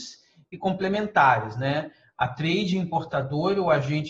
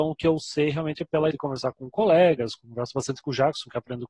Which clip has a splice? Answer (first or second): second